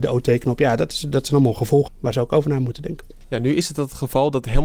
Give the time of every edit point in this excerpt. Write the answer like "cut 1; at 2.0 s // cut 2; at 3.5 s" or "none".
cut 1; at 1.9 s